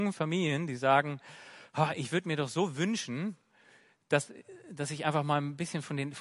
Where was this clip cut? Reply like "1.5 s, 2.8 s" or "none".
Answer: none